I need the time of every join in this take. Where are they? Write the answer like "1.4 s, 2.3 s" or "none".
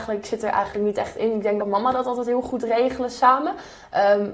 1.6 s

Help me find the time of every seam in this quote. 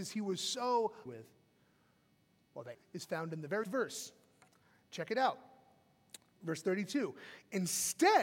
1.1 s, 2.7 s, 3.6 s

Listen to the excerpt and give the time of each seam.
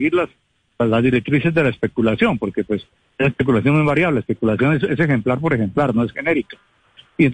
none

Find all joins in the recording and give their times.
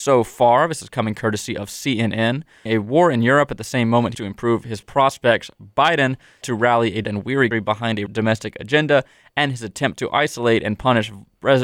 2.7 s, 4.1 s, 4.8 s, 6.4 s, 7.0 s, 7.5 s, 8.1 s

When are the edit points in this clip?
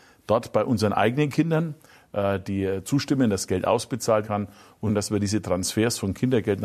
4.2 s, 4.9 s

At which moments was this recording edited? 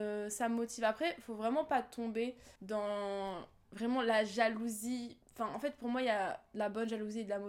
2.6 s, 5.2 s

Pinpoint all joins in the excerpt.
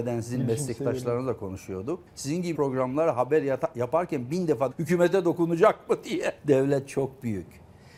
2.1 s, 2.5 s, 4.7 s, 6.4 s

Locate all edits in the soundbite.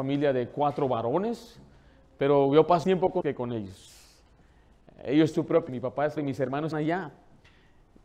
2.8 s, 3.2 s, 5.3 s, 5.7 s, 6.2 s, 6.7 s

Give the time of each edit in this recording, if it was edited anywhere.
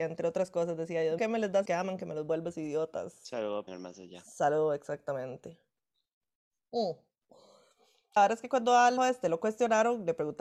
1.2 s, 1.6 s, 3.7 s, 8.2 s, 9.0 s

